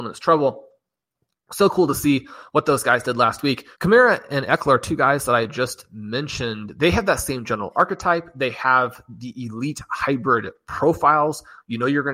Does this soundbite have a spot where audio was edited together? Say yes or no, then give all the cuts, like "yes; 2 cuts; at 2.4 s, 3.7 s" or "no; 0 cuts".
yes; 1 cut; at 3.7 s